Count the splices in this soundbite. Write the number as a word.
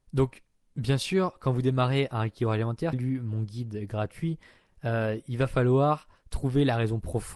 one